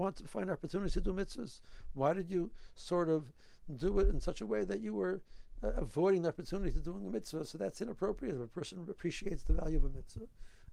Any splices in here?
no; 0 cuts

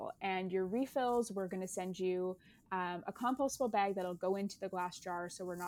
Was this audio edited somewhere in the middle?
no; 0 cuts

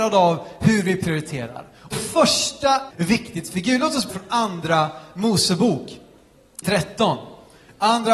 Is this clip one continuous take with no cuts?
no; 4 cuts; at 1.9 s, 2.9 s, 4.1 s, 6.6 s

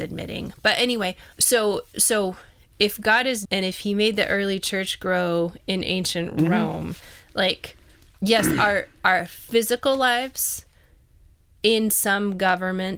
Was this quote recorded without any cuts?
no; 2 cuts; at 1.3 s, 3.4 s

